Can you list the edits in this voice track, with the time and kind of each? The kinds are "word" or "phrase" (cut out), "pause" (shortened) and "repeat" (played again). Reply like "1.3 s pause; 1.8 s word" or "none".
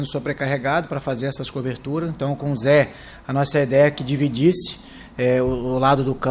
none